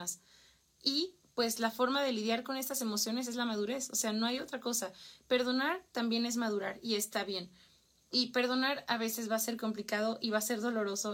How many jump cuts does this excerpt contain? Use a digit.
0